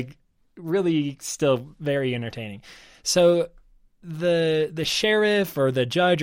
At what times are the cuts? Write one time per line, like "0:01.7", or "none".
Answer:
none